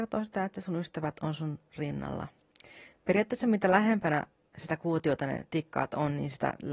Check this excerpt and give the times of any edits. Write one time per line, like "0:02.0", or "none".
none